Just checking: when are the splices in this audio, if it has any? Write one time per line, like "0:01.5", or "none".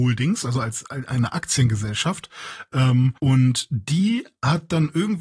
0:03.2